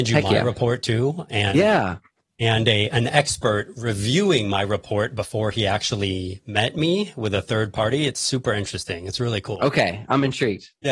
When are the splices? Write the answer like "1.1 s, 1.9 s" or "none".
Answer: none